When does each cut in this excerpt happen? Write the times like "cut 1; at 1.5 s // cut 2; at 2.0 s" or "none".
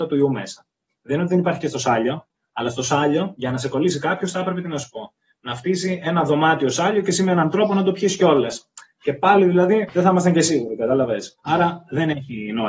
cut 1; at 11.4 s